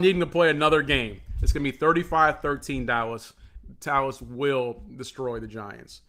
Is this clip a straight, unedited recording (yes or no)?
yes